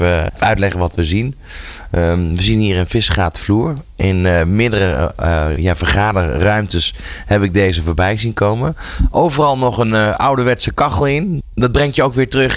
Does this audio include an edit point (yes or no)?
no